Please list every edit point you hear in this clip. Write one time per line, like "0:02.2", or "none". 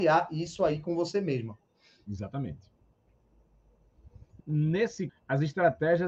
0:04.4
0:05.1